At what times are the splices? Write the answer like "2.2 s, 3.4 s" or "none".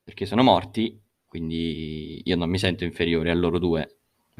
none